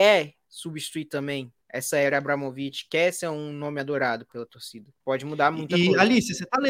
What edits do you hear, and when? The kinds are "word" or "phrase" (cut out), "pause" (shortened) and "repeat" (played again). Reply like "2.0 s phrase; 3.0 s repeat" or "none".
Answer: 1.6 s pause; 5.0 s pause